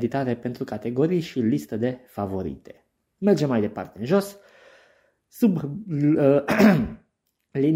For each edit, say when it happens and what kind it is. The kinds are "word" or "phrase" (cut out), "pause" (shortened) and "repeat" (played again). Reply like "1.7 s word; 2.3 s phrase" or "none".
none